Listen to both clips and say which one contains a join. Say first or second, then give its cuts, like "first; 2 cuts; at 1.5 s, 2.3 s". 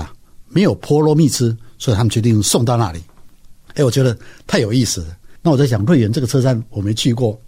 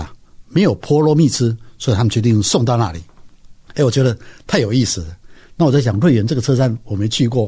first; 1 cut; at 5.4 s